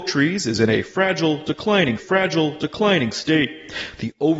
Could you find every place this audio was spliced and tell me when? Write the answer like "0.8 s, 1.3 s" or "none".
2.0 s

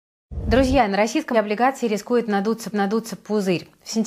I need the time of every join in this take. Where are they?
1.3 s, 2.7 s

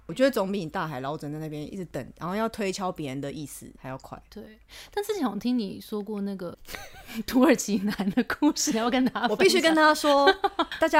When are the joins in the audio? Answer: 3.8 s

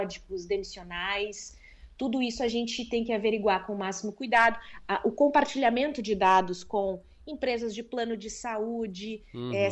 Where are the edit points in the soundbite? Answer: none

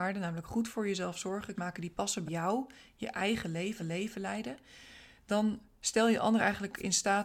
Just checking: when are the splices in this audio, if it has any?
1.5 s, 2.3 s, 3.8 s

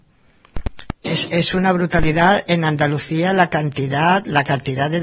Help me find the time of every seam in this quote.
1.0 s

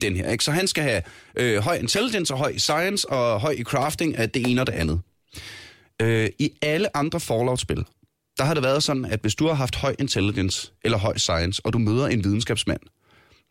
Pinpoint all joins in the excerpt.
none

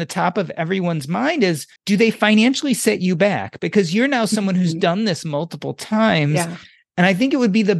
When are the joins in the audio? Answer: 1.8 s

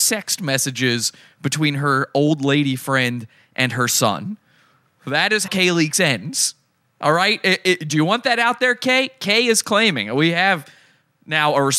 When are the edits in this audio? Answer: 5.5 s

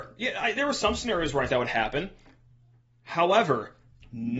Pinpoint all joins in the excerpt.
1.5 s

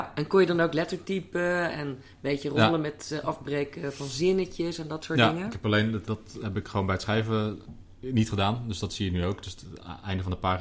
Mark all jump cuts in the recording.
6.1 s

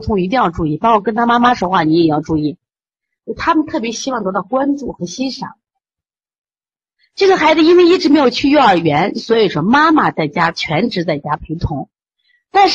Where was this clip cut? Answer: none

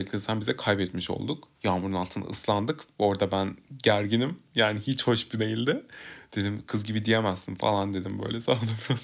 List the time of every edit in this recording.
1.5 s, 5.4 s

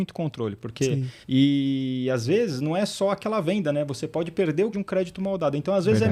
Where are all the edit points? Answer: 1.2 s, 4.7 s

